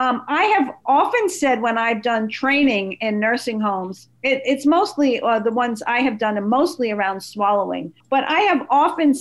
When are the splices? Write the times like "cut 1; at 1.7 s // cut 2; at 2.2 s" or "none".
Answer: cut 1; at 4.1 s // cut 2; at 8.0 s